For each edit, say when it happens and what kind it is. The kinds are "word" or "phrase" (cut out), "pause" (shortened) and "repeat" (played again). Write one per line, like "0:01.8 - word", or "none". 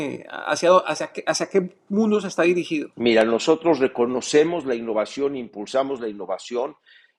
0:02.9 - pause